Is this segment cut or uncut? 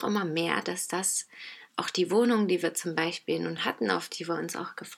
uncut